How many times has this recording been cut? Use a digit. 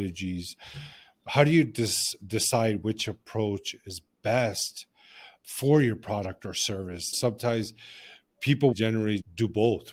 0